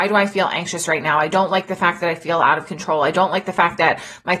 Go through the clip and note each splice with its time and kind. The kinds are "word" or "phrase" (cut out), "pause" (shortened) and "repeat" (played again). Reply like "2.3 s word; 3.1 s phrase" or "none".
none